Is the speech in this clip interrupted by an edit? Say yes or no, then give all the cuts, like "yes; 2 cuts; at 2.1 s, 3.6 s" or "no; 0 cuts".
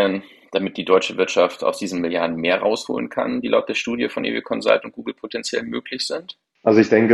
no; 0 cuts